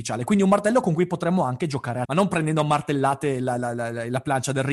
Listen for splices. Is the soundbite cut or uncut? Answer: cut